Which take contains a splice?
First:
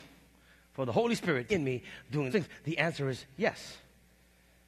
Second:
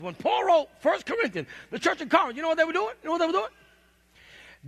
first; 2 cuts; at 1.5 s, 2.3 s

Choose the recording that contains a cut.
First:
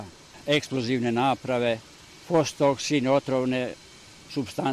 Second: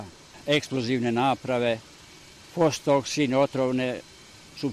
first; 1 cut; at 2.2 s

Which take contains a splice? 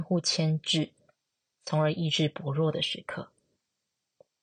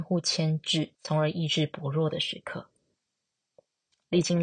second; 1 cut; at 0.9 s

